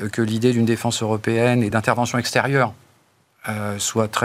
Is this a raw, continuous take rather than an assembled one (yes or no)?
yes